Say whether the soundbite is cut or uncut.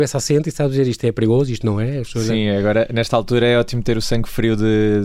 uncut